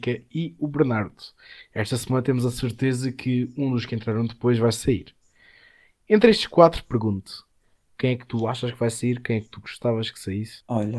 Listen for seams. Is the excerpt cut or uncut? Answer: uncut